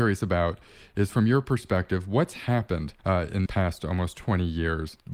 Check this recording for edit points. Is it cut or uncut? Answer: cut